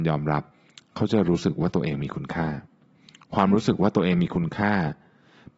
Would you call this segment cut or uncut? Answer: uncut